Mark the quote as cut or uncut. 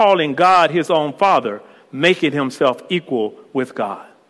uncut